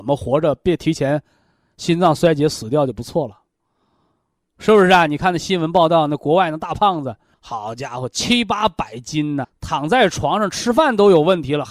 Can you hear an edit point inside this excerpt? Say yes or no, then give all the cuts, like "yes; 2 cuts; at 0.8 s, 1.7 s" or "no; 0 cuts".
yes; 2 cuts; at 7.3 s, 9.4 s